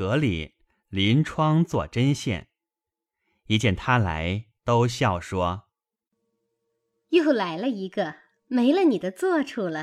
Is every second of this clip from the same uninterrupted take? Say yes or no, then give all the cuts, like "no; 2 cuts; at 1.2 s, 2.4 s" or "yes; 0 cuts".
no; 1 cut; at 4.6 s